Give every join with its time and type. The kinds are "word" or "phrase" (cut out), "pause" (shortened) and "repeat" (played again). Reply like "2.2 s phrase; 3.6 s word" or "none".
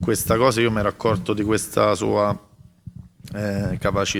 none